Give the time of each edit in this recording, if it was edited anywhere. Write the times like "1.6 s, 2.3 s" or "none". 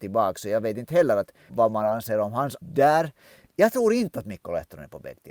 1.5 s, 2.6 s